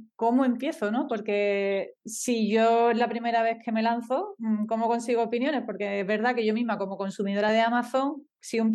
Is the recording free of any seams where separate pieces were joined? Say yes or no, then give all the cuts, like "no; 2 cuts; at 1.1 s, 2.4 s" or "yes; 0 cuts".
yes; 0 cuts